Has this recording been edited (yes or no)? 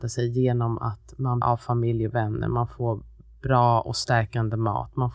yes